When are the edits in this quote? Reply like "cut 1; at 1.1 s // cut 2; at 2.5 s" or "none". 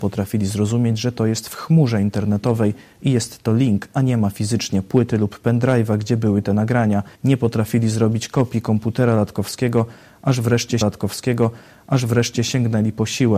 cut 1; at 7.1 s // cut 2; at 10.8 s

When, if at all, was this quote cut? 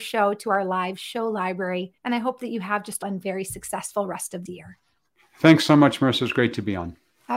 cut 1; at 2.0 s // cut 2; at 3.0 s // cut 3; at 4.5 s

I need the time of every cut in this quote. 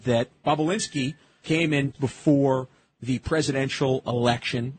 cut 1; at 1.4 s // cut 2; at 1.9 s

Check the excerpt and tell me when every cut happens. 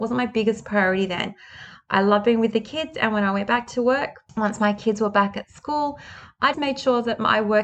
cut 1; at 6.5 s

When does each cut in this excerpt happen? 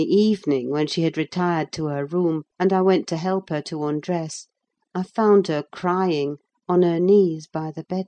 none

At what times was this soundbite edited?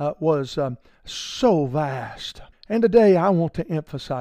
cut 1; at 2.5 s

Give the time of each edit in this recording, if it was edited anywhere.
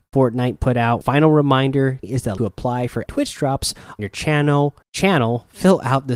cut 1; at 1.0 s // cut 2; at 2.0 s // cut 3; at 2.4 s // cut 4; at 3.1 s // cut 5; at 4.0 s // cut 6; at 4.8 s

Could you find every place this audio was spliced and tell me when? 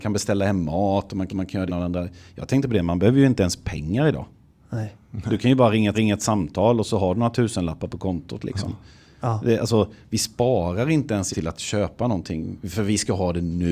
cut 1; at 1.3 s // cut 2; at 1.7 s // cut 3; at 5.9 s // cut 4; at 11.3 s

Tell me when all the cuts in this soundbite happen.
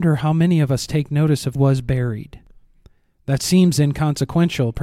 cut 1; at 1.6 s

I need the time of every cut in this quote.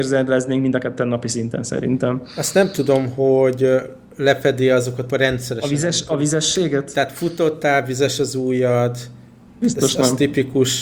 cut 1; at 5.1 s

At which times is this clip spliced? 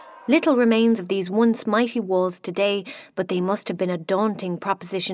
none

